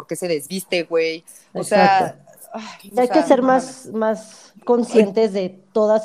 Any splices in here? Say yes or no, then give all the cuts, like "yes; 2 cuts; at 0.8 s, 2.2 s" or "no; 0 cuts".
yes; 2 cuts; at 3.0 s, 4.6 s